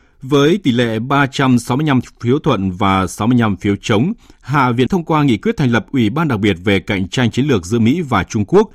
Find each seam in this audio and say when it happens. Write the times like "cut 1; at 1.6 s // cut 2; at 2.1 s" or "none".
cut 1; at 4.9 s